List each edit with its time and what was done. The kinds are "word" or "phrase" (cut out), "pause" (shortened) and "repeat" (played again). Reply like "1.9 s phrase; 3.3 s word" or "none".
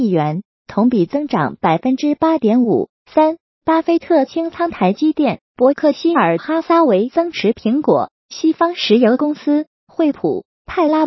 3.0 s pause; 5.5 s pause